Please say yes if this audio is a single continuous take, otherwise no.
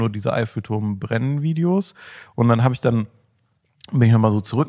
yes